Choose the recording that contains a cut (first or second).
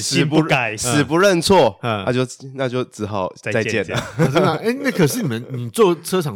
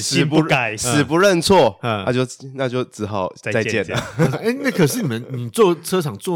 second